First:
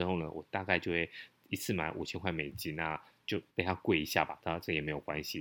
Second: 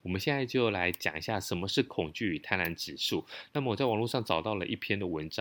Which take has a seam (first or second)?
first